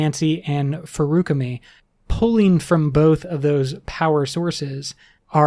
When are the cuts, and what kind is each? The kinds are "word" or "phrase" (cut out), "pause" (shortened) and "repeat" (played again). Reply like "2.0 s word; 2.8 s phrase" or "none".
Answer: none

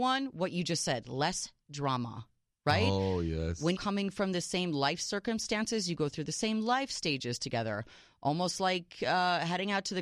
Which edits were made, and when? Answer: 3.8 s phrase

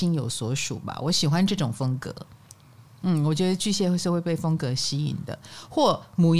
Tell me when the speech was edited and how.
none

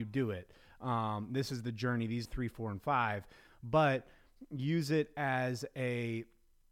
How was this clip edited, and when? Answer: 2.3 s phrase

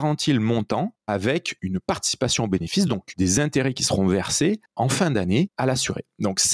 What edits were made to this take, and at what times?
none

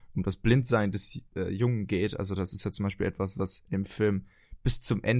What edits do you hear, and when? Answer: none

